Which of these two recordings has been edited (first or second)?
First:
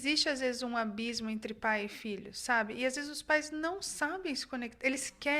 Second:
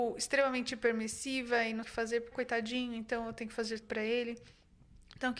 second